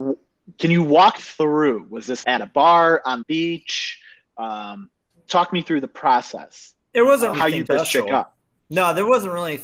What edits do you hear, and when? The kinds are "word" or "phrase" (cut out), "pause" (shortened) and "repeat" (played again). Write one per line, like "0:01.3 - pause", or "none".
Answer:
0:01.2 - word
0:02.2 - word
0:03.2 - word
0:05.3 - word
0:07.3 - word
0:07.7 - word

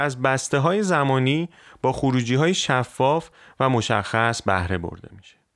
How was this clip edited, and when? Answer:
none

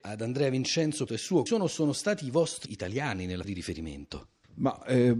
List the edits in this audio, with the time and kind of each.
0:01.1 - phrase
0:01.5 - word
0:02.7 - word
0:03.4 - word

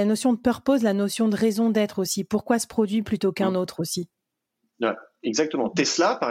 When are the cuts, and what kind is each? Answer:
none

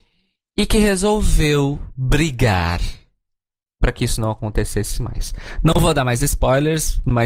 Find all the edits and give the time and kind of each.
none

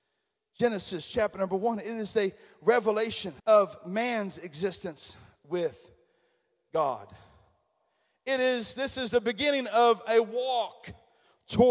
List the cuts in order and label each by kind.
0:03.4 - pause

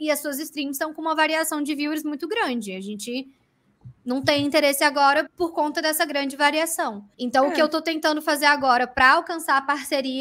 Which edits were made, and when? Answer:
0:04.0 - pause
0:05.3 - word
0:07.1 - pause

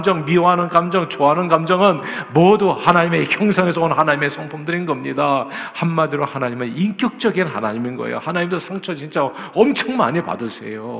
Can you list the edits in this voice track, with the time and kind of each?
none

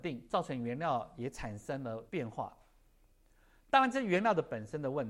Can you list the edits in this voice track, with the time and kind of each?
0:02.1 - pause

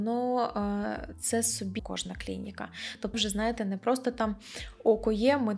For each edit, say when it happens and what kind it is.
0:01.8 - phrase
0:03.1 - word

